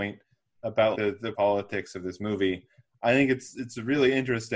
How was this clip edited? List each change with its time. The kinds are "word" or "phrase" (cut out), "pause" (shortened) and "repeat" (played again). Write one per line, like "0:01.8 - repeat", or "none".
0:00.9 - word
0:01.3 - word